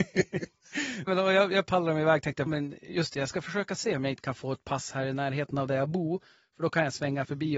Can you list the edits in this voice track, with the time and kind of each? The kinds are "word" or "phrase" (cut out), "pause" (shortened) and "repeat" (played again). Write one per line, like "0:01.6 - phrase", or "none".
0:01.1 - word
0:02.5 - word